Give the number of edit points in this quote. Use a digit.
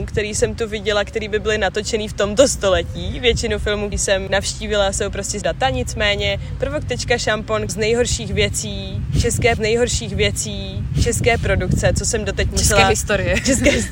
5